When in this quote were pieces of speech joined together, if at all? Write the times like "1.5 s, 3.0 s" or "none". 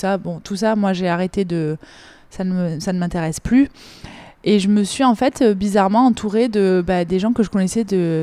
none